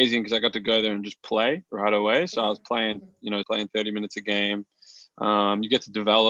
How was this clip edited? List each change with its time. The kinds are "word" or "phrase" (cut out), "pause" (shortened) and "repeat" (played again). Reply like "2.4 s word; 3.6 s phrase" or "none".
3.4 s word